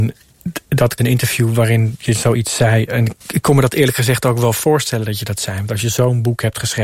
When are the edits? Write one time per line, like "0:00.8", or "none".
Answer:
0:01.0
0:03.2